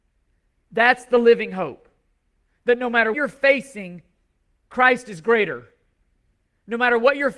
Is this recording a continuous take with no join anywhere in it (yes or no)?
no